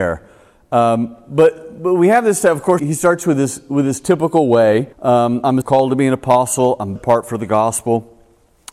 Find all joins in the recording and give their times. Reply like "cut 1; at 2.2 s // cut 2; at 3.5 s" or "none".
cut 1; at 2.8 s // cut 2; at 4.9 s // cut 3; at 5.6 s // cut 4; at 7.0 s